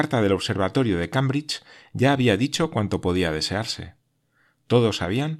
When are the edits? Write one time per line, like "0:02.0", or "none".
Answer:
none